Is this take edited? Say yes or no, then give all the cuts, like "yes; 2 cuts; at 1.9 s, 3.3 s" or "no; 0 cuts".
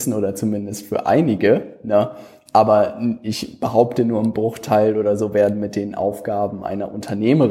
no; 0 cuts